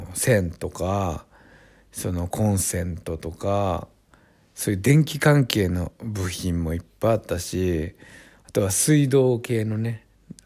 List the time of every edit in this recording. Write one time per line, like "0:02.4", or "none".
none